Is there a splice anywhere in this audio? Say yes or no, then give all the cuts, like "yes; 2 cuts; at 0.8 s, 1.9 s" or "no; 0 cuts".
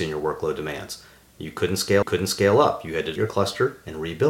yes; 2 cuts; at 2.0 s, 3.2 s